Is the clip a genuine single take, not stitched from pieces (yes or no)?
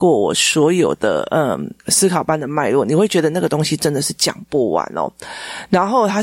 no